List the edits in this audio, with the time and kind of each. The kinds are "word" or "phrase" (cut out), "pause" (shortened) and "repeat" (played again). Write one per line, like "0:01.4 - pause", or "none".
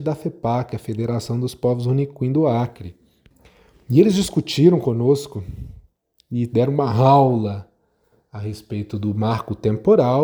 none